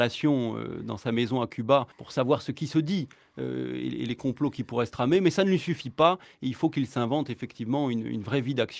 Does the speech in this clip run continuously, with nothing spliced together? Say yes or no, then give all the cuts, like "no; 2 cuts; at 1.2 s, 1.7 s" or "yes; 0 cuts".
no; 1 cut; at 1.9 s